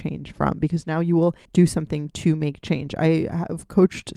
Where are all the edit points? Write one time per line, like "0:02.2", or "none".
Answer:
0:01.5